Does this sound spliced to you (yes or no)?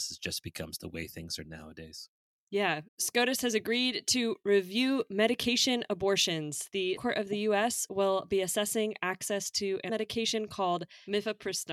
yes